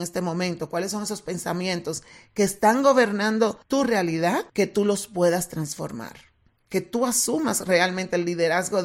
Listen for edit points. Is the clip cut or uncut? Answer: uncut